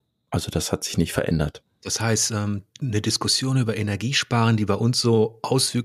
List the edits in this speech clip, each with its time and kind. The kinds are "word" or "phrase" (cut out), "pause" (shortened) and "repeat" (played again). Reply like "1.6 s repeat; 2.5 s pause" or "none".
none